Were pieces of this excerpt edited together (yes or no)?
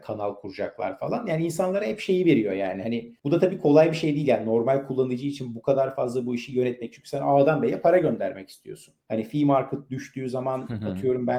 yes